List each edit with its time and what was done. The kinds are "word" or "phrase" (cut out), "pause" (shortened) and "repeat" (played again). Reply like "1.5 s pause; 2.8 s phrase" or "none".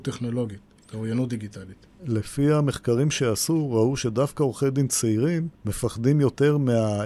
5.5 s pause